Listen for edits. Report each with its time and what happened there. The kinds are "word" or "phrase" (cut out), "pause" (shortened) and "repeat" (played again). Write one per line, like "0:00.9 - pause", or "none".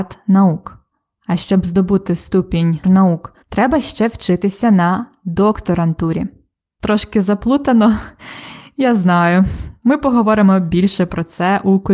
0:02.8 - word
0:03.4 - pause

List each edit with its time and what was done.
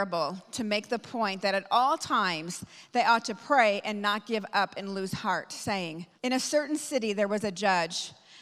0:06.2 - pause

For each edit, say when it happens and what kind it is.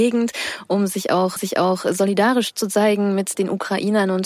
0:01.4 - repeat

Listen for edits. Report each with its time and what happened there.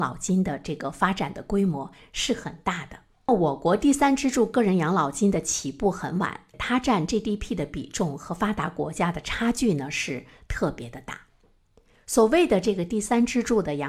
none

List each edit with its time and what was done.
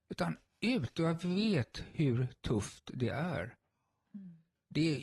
none

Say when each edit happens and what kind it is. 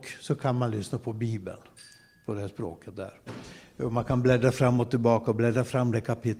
none

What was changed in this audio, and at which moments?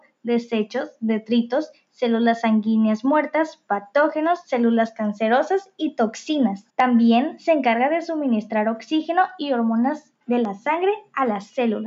0:06.7 - pause
0:10.2 - pause

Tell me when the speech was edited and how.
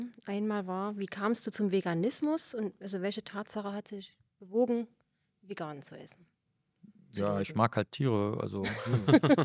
none

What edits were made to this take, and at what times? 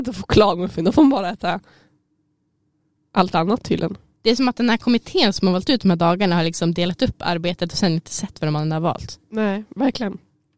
none

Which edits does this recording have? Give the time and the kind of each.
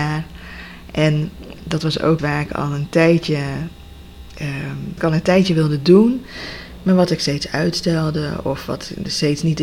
0:01.6 - word
0:02.2 - word
0:05.0 - word

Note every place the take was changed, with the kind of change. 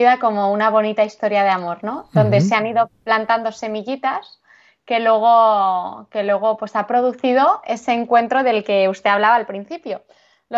none

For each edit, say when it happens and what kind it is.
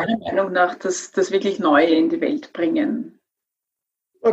none

